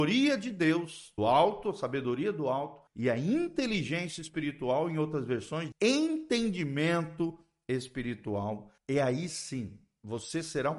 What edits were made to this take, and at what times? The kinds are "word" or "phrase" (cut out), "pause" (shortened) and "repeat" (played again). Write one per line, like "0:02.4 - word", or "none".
0:01.2 - word
0:02.9 - pause
0:05.7 - word
0:08.8 - pause